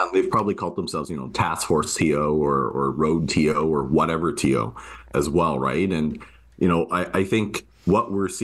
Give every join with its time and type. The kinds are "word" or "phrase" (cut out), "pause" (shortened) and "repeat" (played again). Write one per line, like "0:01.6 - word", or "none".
none